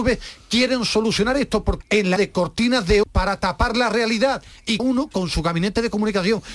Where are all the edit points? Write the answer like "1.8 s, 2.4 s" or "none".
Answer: 1.8 s, 2.2 s, 3.0 s, 4.8 s